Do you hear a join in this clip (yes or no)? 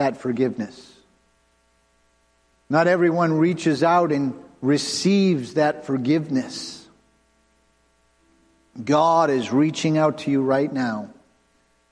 no